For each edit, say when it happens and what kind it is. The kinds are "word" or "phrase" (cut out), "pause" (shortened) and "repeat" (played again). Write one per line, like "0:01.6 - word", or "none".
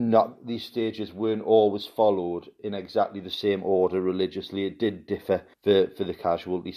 0:05.5 - pause